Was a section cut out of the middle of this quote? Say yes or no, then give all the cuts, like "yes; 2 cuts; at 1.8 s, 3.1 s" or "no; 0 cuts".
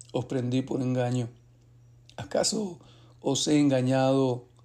no; 0 cuts